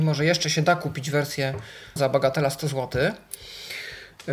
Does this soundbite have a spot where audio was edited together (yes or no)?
yes